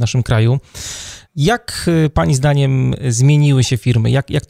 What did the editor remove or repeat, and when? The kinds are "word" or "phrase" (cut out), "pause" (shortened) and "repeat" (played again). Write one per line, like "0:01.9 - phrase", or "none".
0:01.3 - pause